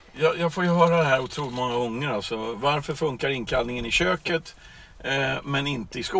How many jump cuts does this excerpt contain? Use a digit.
0